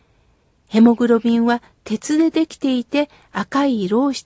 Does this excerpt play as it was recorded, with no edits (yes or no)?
yes